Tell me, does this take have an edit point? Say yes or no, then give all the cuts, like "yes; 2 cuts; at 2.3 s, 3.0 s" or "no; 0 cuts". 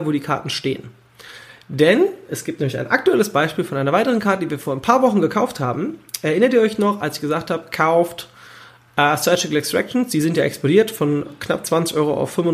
no; 0 cuts